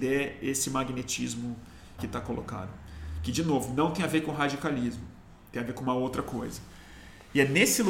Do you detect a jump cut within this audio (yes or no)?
yes